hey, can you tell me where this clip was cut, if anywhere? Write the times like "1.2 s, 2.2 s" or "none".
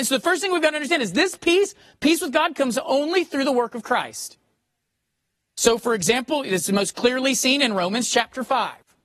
none